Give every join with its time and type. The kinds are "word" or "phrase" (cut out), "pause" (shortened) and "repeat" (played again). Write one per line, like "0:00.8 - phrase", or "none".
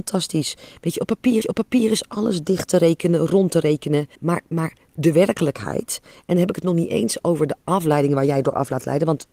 0:01.4 - repeat
0:04.2 - pause